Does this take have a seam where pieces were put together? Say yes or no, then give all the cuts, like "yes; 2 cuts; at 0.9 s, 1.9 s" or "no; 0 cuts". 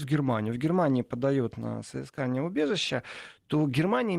no; 0 cuts